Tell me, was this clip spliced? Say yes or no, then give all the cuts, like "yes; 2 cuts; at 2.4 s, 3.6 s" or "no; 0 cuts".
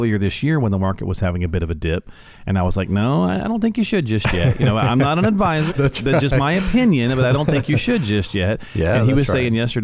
yes; 1 cut; at 5.7 s